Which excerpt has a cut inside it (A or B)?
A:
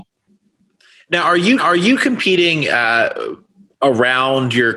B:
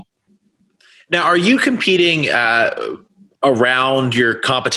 A